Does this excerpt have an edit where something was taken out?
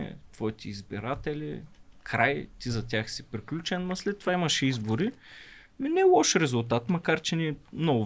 no; 0 cuts

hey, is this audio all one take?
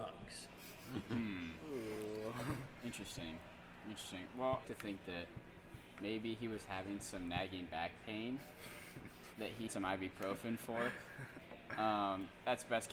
no; 2 cuts; at 4.6 s, 9.7 s

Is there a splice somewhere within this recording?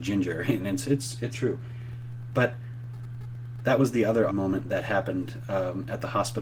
yes; 2 cuts; at 1.3 s, 4.3 s

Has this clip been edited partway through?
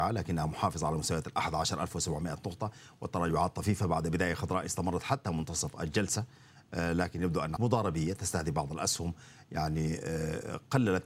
yes; 1 cut; at 7.6 s

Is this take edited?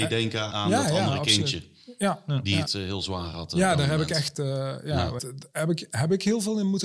yes; 1 cut; at 5.2 s

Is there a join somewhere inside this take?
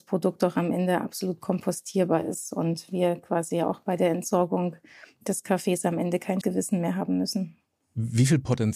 yes; 1 cut; at 6.4 s

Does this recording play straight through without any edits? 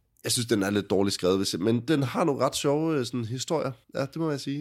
yes; 0 cuts

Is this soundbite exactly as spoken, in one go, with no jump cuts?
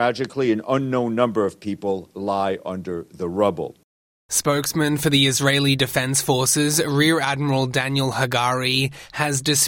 yes; 0 cuts

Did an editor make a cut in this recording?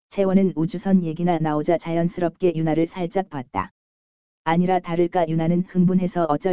no; 0 cuts

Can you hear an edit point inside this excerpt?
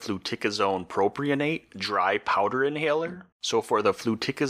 yes; 1 cut; at 3.3 s

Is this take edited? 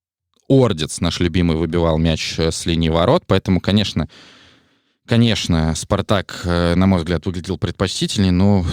no; 0 cuts

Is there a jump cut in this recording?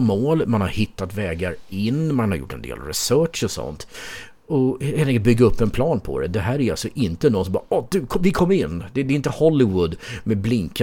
no; 0 cuts

